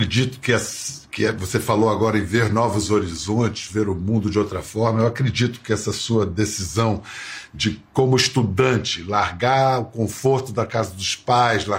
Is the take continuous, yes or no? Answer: yes